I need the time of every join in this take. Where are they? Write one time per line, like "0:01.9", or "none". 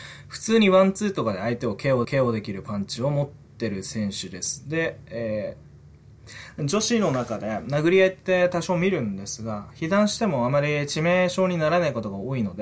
0:02.0